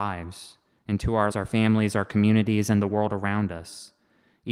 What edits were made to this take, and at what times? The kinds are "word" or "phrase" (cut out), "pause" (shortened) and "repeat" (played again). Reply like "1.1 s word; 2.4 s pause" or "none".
1.3 s word

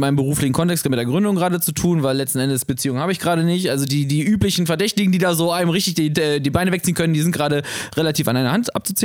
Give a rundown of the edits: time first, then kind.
none

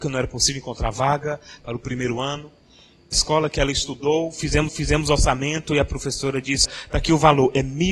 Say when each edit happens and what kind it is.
3.1 s phrase; 4.7 s repeat; 6.6 s word

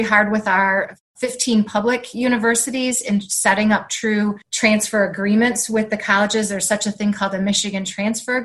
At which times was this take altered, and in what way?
4.4 s pause

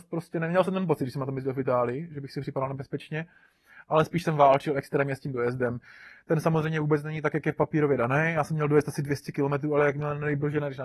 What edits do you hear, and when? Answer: none

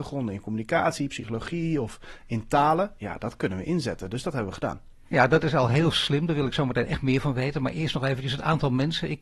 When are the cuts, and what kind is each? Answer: none

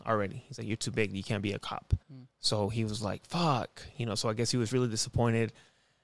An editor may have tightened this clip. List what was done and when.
2.0 s pause

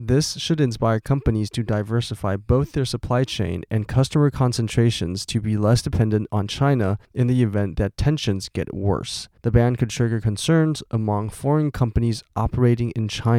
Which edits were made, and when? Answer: 7.0 s pause; 9.4 s pause

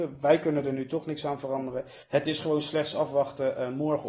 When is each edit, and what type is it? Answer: 2.0 s pause

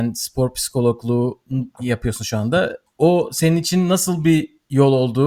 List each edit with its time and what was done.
none

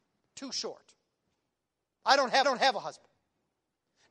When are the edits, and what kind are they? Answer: 2.4 s repeat

